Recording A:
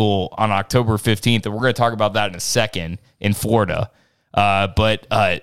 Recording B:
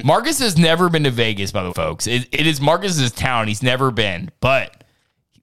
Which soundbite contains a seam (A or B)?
B